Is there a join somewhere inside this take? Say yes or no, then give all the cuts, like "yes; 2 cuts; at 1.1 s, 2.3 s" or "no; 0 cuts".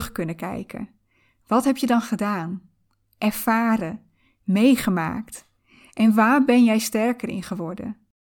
no; 0 cuts